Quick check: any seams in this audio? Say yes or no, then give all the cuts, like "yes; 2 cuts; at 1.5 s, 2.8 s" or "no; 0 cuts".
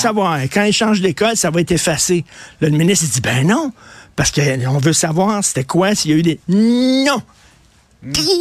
no; 0 cuts